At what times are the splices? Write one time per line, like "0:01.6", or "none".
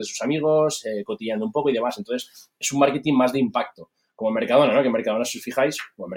none

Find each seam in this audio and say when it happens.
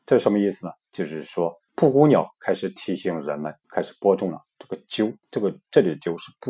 0:01.7
0:03.6
0:05.2

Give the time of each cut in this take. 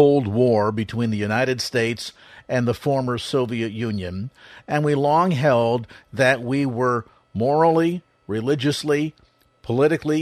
none

